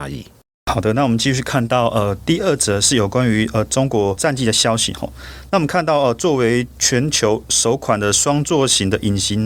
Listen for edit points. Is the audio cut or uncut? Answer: uncut